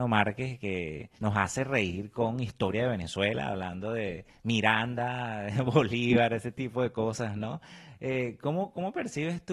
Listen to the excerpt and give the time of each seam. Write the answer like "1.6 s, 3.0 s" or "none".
1.2 s